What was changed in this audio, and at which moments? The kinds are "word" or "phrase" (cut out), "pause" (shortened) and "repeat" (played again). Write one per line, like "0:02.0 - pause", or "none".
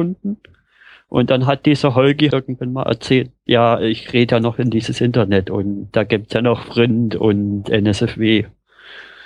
0:02.3 - word